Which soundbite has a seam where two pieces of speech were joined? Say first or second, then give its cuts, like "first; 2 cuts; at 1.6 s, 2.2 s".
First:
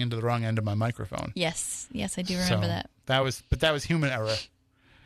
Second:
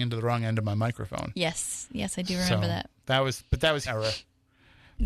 second; 1 cut; at 3.9 s